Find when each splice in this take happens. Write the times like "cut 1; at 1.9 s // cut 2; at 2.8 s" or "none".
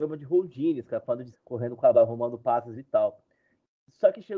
cut 1; at 1.3 s // cut 2; at 1.9 s // cut 3; at 2.7 s